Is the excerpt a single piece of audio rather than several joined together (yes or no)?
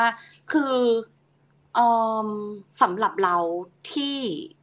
no